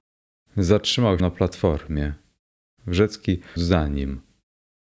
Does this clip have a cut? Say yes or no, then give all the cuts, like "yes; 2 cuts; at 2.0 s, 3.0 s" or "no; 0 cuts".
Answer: yes; 2 cuts; at 1.2 s, 3.6 s